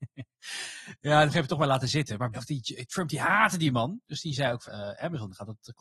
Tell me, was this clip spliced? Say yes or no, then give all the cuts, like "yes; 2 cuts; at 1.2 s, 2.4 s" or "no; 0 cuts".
yes; 3 cuts; at 1.3 s, 2.3 s, 4.7 s